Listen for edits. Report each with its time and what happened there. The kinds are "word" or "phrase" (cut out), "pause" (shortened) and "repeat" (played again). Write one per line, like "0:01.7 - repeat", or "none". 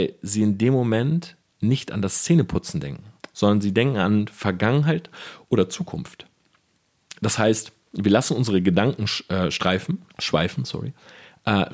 0:10.1 - pause